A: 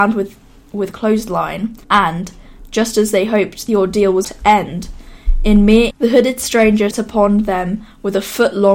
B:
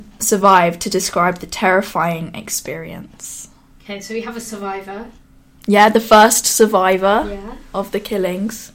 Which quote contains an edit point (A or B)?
A